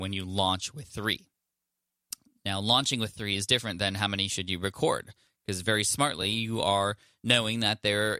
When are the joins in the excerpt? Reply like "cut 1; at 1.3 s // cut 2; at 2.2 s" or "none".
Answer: none